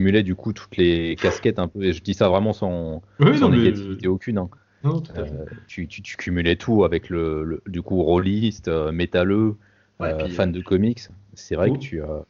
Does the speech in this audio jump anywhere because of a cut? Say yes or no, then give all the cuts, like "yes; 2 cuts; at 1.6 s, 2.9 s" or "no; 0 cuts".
no; 0 cuts